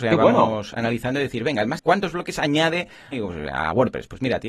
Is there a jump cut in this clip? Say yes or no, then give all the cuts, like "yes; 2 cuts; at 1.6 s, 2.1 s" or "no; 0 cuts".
yes; 2 cuts; at 1.8 s, 3.1 s